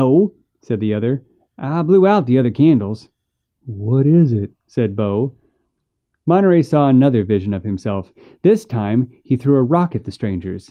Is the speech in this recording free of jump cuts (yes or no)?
yes